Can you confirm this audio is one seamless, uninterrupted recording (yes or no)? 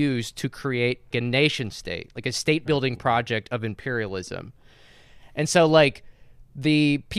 no